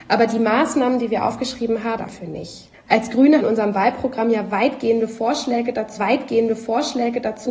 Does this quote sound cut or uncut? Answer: cut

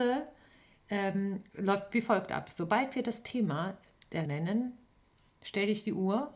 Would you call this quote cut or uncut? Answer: cut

